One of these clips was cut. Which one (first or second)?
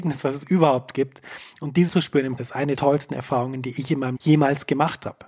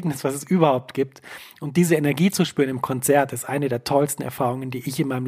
first